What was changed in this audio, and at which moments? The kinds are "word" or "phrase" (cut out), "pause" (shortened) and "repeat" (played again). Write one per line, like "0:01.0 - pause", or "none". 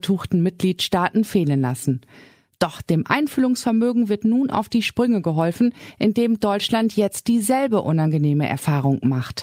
none